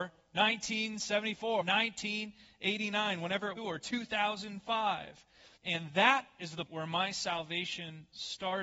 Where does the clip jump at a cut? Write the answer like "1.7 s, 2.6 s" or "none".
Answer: 1.6 s, 3.6 s, 5.6 s, 6.7 s